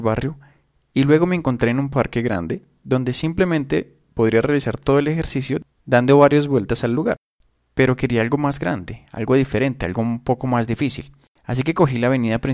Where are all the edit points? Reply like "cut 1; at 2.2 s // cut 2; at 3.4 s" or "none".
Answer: none